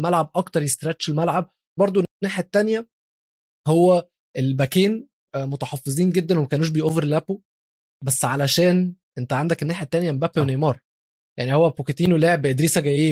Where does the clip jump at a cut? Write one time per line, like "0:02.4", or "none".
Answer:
0:01.8
0:05.3